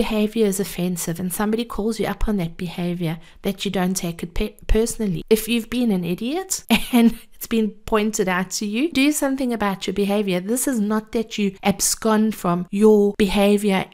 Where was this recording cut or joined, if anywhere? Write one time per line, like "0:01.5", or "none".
0:08.9
0:12.3